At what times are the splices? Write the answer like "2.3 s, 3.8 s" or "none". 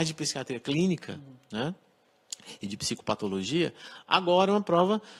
none